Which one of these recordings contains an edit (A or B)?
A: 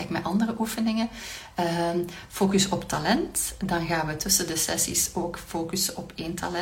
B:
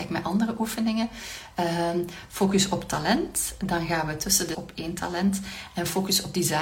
B